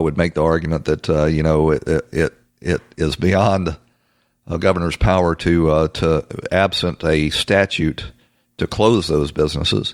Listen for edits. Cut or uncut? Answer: uncut